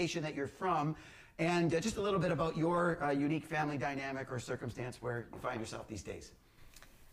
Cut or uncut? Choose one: uncut